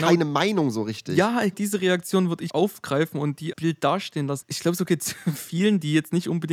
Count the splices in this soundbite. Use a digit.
4